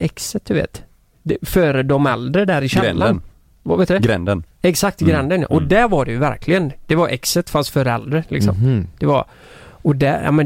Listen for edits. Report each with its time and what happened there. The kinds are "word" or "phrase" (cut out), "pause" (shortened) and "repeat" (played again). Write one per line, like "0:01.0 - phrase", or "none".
none